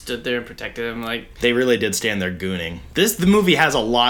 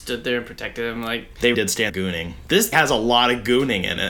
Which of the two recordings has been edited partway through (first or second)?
second